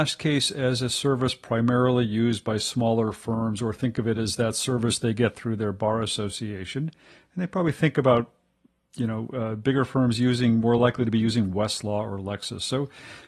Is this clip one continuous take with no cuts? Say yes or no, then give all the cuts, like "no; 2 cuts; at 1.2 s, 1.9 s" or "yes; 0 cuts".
yes; 0 cuts